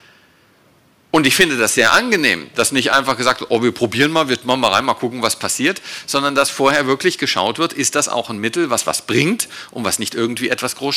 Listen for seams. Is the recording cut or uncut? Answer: uncut